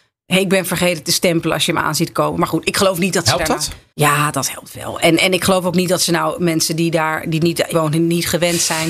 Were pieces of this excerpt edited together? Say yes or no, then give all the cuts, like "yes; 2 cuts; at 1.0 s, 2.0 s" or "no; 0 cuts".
yes; 2 cuts; at 3.9 s, 7.7 s